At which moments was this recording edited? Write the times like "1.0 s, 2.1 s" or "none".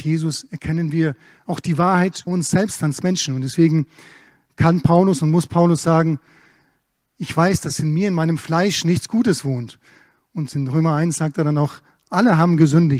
2.3 s